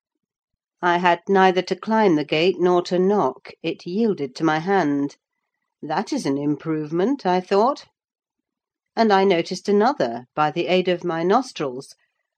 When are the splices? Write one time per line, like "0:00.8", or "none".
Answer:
none